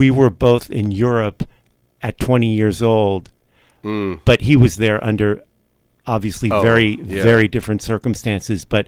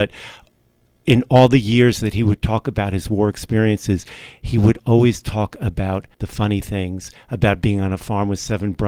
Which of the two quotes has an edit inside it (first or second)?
second